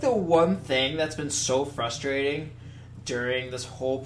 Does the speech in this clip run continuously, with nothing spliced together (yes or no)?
yes